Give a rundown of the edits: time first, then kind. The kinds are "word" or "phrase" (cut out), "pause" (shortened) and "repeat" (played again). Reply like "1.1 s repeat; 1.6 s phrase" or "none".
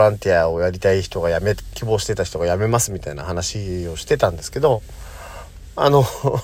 1.7 s word